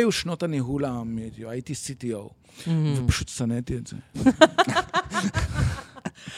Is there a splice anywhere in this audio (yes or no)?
no